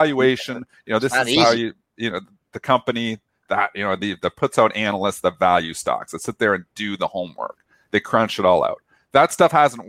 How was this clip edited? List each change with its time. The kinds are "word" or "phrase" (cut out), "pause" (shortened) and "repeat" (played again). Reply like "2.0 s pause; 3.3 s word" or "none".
none

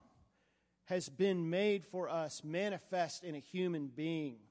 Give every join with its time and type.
none

